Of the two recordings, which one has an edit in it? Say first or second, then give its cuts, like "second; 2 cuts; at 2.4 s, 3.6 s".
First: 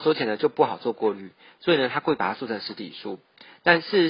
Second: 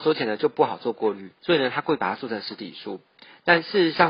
second; 1 cut; at 1.4 s